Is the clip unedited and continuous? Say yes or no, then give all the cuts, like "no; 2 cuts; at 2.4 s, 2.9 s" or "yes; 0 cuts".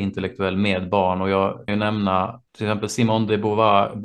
no; 2 cuts; at 1.7 s, 2.5 s